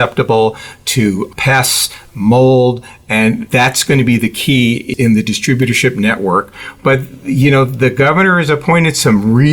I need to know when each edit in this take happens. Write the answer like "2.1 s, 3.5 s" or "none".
1.3 s, 4.9 s